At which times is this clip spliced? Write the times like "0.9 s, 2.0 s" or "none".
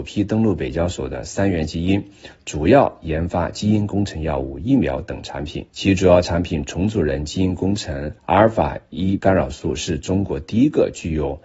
5.7 s, 8.2 s, 9.2 s